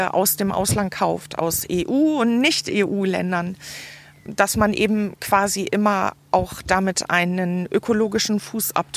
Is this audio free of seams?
yes; 0 cuts

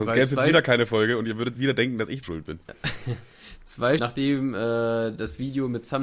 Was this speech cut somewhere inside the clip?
yes; 3 cuts; at 1.6 s, 2.2 s, 4.0 s

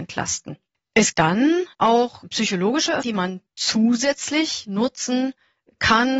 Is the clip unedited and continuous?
no; 4 cuts; at 1.1 s, 1.7 s, 3.0 s, 3.5 s

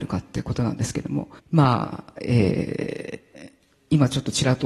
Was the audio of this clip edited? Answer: yes; 1 cut; at 1.4 s

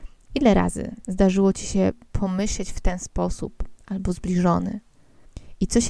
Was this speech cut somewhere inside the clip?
no; 0 cuts

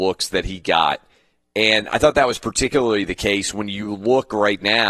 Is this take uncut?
yes; 0 cuts

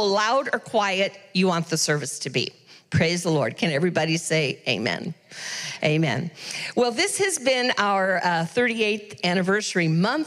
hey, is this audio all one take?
yes; 0 cuts

